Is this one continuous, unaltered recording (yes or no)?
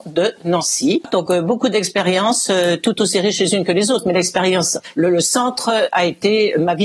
yes